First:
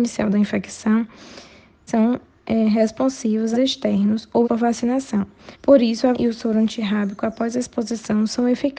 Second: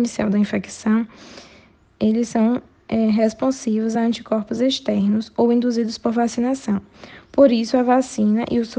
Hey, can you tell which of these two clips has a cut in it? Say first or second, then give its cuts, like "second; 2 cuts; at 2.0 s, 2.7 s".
first; 5 cuts; at 1.9 s, 3.5 s, 4.4 s, 5.5 s, 6.1 s